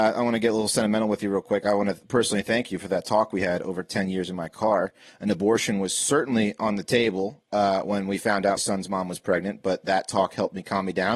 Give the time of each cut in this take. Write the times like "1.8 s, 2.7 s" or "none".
8.6 s